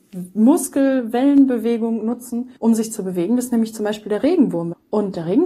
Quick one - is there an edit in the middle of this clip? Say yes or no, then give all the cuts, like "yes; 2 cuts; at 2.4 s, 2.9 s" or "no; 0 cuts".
yes; 1 cut; at 2.6 s